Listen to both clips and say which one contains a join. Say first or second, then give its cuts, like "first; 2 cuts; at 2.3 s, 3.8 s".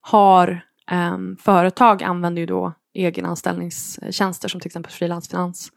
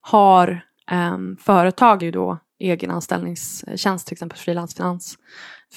second; 2 cuts; at 2.0 s, 4.1 s